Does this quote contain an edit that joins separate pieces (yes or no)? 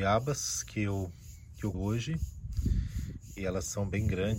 yes